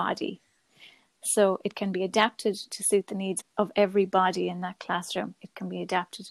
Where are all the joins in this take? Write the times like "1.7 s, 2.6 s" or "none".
3.4 s